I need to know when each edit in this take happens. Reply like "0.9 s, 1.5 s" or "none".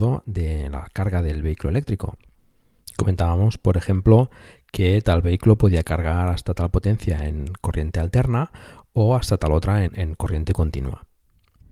9.9 s

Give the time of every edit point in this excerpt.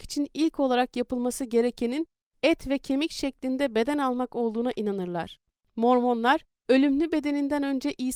none

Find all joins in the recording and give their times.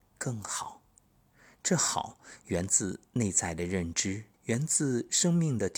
4.3 s

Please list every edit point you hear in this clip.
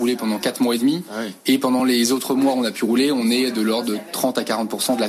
none

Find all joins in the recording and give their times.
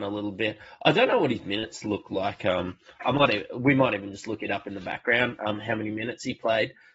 none

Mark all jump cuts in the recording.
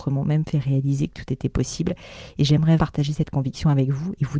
2.8 s

